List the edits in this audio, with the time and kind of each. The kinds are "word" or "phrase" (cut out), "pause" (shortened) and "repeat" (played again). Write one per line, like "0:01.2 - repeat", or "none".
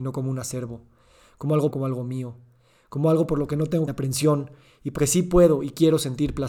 0:01.7 - phrase
0:03.9 - phrase
0:05.0 - word